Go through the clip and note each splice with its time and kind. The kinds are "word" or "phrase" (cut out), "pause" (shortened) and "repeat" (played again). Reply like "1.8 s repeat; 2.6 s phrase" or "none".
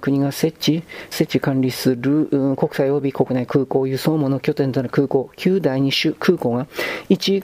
1.1 s phrase